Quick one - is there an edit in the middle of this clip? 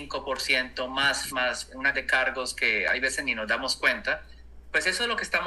yes; 2 cuts; at 1.3 s, 1.9 s

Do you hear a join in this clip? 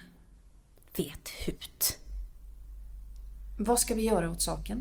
no; 0 cuts

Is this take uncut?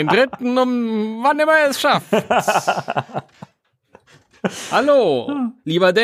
yes; 0 cuts

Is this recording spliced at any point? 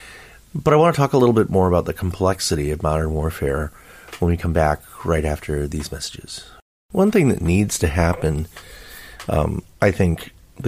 yes; 2 cuts; at 6.6 s, 9.7 s

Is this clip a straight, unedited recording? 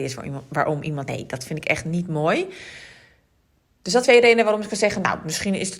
no; 2 cuts; at 1.1 s, 4.0 s

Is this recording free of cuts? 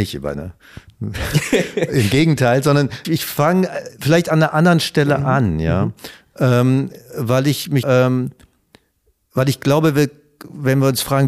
no; 2 cuts; at 3.0 s, 7.8 s

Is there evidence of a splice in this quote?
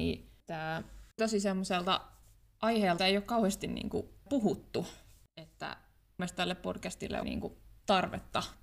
yes; 5 cuts; at 1.2 s, 3.0 s, 4.3 s, 6.2 s, 7.2 s

